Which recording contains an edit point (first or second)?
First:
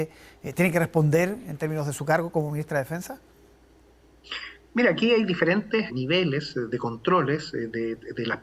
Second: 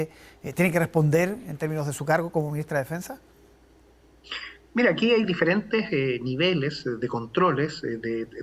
first